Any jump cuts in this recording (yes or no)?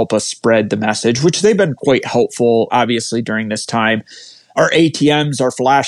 no